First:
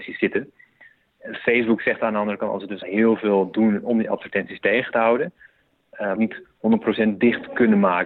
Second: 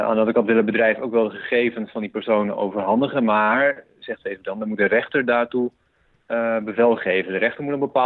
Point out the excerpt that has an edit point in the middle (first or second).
first